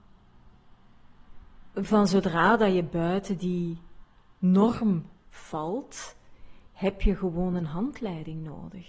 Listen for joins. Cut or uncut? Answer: uncut